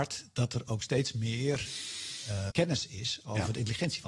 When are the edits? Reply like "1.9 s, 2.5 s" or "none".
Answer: 2.5 s

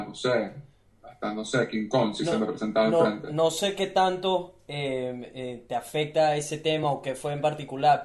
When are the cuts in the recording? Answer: none

